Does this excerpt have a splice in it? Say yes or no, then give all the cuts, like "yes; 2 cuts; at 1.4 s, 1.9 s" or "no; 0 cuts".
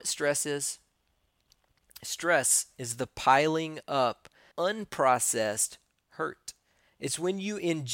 yes; 1 cut; at 4.5 s